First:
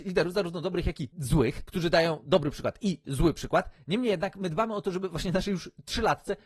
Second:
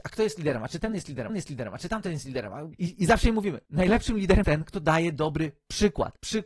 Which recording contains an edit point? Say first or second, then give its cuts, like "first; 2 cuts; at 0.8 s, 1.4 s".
second; 2 cuts; at 1.3 s, 4.4 s